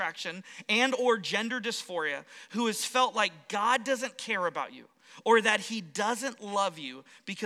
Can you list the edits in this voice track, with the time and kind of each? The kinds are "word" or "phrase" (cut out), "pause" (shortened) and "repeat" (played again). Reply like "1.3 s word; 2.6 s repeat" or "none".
none